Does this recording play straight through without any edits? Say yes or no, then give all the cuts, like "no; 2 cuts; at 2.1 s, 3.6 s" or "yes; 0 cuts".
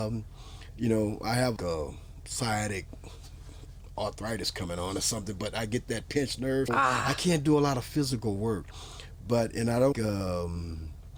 no; 3 cuts; at 1.6 s, 6.7 s, 9.9 s